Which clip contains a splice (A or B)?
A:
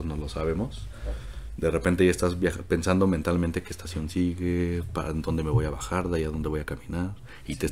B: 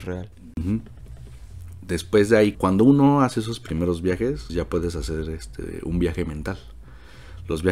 B